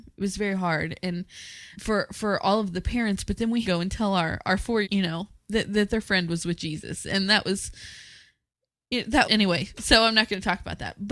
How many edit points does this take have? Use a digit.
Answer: 4